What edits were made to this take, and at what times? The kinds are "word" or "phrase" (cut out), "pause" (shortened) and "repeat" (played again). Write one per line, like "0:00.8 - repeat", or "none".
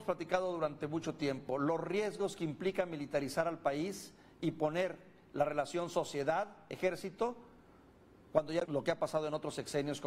0:08.6 - word